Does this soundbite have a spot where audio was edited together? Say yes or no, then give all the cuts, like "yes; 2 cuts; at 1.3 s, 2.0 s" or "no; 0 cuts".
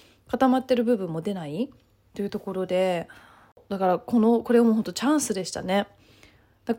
no; 0 cuts